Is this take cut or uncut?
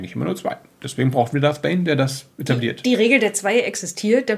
cut